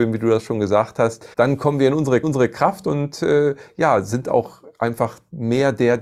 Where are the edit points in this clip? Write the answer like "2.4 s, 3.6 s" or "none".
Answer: 1.3 s, 2.2 s